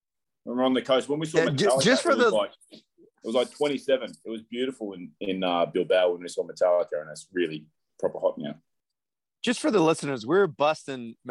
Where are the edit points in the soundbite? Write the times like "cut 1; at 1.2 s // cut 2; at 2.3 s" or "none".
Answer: none